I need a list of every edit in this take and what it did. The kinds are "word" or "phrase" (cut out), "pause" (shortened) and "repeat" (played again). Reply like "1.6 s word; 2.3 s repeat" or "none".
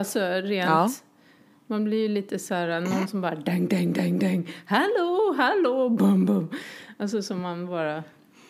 none